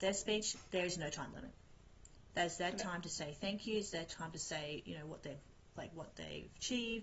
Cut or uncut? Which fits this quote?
uncut